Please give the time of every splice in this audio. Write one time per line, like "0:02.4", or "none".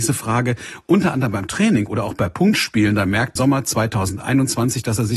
0:03.4